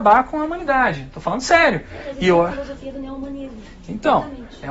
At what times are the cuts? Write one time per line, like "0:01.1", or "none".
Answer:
none